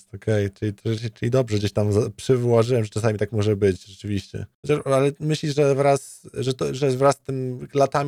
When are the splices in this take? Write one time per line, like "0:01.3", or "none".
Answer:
0:04.5